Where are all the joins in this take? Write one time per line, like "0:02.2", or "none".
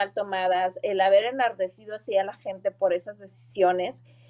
none